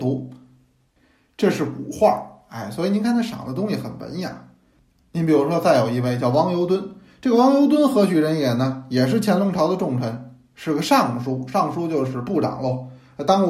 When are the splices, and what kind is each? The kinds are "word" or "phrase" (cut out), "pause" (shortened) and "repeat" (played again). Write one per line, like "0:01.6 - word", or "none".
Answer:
none